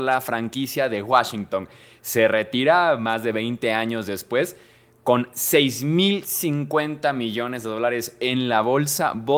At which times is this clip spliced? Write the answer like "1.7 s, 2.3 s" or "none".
none